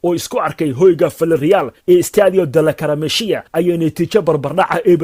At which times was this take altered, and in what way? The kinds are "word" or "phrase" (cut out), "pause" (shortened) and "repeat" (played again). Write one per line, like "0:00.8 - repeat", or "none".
0:01.8 - pause
0:03.5 - pause